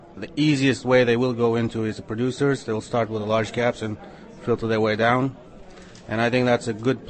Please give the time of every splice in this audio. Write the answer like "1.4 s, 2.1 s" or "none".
none